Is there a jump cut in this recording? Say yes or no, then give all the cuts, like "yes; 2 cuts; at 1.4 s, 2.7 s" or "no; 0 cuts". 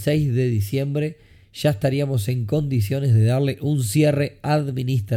no; 0 cuts